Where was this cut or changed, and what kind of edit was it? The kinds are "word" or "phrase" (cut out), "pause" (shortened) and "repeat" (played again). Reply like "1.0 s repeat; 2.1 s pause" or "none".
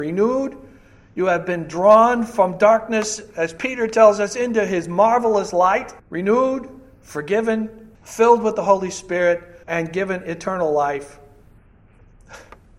6.0 s pause; 7.9 s pause; 9.6 s pause